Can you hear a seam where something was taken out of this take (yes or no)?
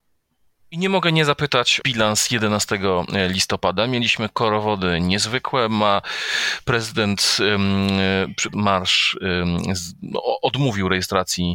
yes